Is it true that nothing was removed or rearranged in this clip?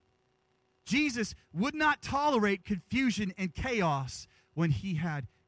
yes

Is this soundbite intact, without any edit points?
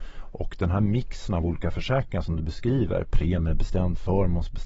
yes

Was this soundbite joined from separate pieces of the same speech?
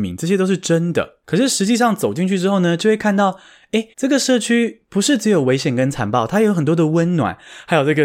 yes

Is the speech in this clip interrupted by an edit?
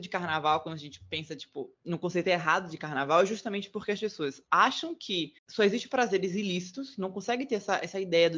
yes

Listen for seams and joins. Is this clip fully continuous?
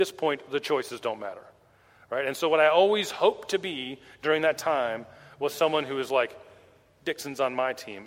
yes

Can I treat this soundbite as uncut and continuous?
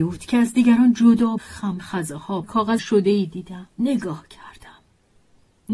no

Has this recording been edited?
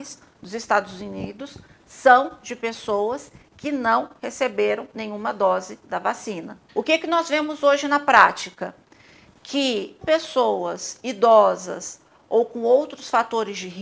yes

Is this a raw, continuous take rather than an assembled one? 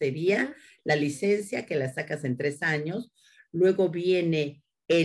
yes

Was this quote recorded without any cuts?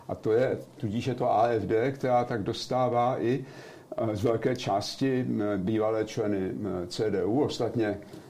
yes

